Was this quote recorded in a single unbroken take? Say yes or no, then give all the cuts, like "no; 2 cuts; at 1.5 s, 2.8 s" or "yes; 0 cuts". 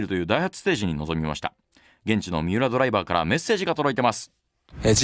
yes; 0 cuts